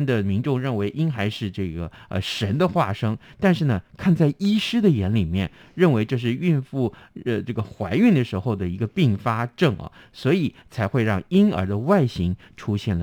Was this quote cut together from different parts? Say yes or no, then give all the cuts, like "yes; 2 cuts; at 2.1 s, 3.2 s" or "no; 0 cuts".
no; 0 cuts